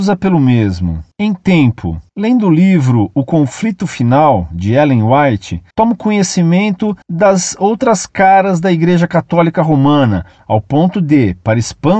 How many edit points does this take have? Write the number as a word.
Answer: three